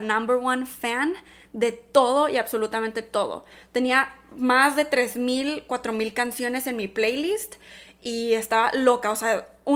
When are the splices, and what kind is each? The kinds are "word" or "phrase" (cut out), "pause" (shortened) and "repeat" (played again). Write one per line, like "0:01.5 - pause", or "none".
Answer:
none